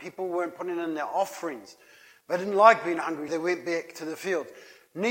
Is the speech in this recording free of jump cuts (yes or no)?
no